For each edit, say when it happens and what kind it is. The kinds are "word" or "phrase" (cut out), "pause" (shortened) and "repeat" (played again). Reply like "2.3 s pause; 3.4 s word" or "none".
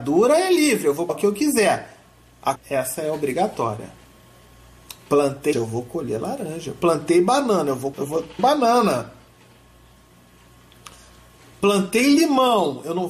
1.1 s word; 2.6 s word; 5.5 s word; 7.9 s word; 8.4 s word